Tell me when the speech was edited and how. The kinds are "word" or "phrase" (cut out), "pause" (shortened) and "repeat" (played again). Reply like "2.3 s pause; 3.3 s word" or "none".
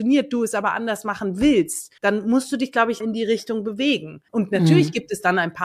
2.0 s pause; 3.0 s word; 4.3 s pause